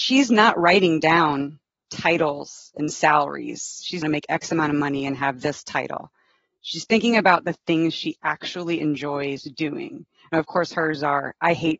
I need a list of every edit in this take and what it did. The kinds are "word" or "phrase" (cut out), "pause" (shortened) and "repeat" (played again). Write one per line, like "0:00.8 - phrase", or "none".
0:04.0 - phrase